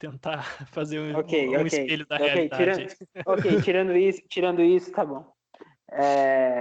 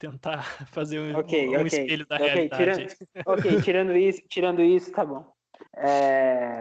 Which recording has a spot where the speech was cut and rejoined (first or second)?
second